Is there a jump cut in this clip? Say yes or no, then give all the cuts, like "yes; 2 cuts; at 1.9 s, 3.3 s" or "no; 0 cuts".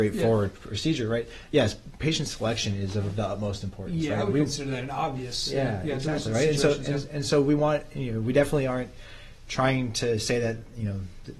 no; 0 cuts